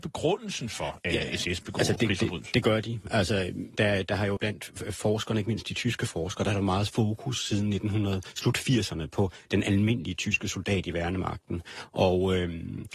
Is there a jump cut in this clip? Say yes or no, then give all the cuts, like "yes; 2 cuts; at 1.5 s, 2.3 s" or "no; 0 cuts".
yes; 2 cuts; at 2.0 s, 4.4 s